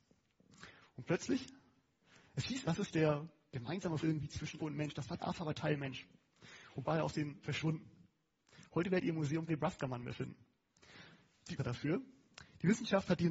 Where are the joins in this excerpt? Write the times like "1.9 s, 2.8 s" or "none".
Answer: 2.7 s, 4.0 s, 4.6 s, 5.2 s, 6.9 s, 7.4 s, 9.5 s, 11.6 s